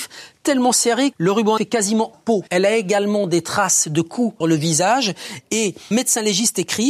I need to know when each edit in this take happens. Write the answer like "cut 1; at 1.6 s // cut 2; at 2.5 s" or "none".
cut 1; at 1.1 s // cut 2; at 1.6 s // cut 3; at 2.1 s // cut 4; at 2.5 s // cut 5; at 4.4 s // cut 6; at 5.9 s